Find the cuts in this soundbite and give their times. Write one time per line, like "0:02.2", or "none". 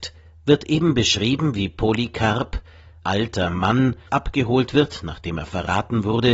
0:03.0
0:04.1